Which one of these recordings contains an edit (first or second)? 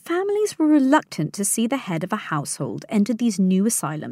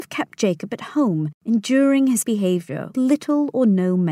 second